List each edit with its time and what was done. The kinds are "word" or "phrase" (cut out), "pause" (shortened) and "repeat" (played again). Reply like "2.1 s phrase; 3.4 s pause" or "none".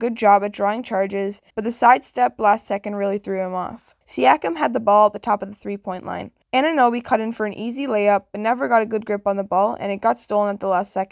1.5 s pause; 4.0 s pause; 6.4 s pause